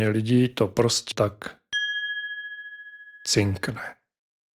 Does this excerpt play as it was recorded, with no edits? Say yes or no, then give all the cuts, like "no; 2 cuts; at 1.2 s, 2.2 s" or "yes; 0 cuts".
no; 1 cut; at 1.1 s